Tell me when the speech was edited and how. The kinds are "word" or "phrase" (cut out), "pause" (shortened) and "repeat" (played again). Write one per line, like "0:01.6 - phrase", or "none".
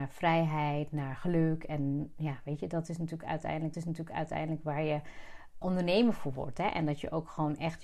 0:03.7 - repeat
0:05.6 - word